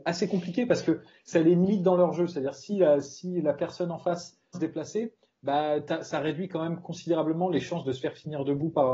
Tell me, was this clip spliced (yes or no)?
yes